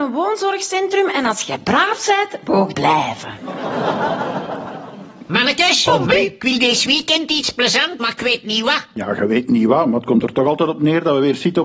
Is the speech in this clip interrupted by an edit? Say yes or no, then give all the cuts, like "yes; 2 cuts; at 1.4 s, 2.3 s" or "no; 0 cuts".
yes; 2 cuts; at 2.7 s, 8.0 s